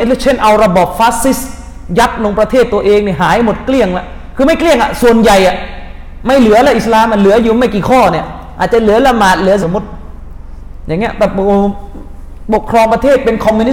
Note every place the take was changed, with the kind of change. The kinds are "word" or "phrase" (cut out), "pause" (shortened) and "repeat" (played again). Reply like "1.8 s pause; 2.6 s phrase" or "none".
9.6 s word